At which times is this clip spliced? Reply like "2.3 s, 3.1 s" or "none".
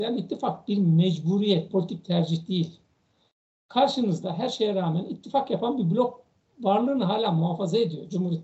1.7 s